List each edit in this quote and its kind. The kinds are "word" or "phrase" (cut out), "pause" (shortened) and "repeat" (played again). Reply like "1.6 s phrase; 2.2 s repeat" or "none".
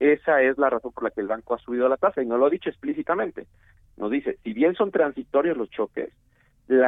none